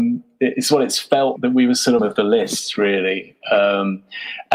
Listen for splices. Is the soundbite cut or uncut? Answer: cut